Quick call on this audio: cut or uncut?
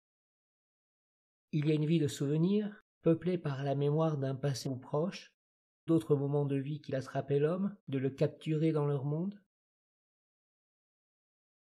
cut